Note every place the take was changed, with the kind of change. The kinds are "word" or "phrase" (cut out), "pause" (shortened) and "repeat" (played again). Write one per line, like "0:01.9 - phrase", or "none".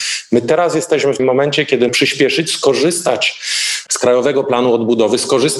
0:01.2 - word
0:01.9 - word